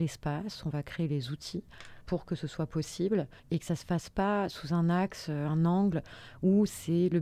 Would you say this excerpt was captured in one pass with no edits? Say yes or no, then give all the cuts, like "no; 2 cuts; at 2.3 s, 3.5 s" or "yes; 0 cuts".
no; 2 cuts; at 2.0 s, 3.4 s